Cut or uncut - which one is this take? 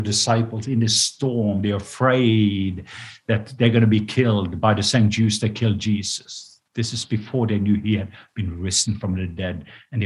uncut